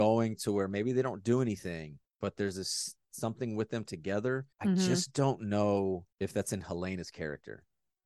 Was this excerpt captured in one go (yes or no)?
no